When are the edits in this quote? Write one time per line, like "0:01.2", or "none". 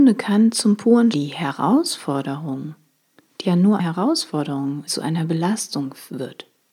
0:01.1
0:03.4
0:03.8
0:04.9

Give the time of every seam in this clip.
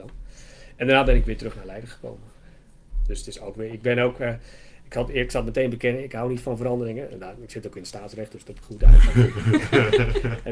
0:08.6

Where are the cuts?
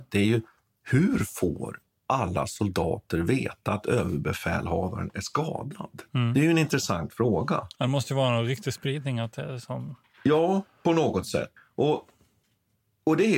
0:06.1
0:11.6

